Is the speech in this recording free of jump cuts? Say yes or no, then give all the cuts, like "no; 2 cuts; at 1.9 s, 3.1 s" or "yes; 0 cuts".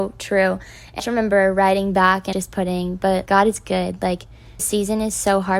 no; 4 cuts; at 1.0 s, 2.3 s, 3.3 s, 4.6 s